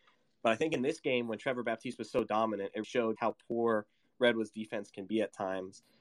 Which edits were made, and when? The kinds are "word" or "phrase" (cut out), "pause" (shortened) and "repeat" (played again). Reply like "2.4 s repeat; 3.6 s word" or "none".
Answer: 2.8 s word; 3.2 s word